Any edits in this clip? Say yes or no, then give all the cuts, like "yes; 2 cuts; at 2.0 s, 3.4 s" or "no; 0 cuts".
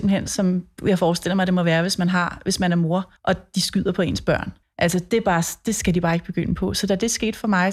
yes; 2 cuts; at 3.2 s, 4.6 s